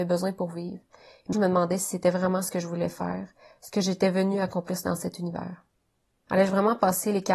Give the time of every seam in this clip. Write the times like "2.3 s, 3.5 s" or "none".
1.3 s